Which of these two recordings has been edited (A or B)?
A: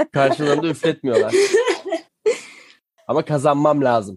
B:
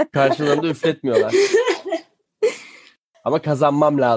A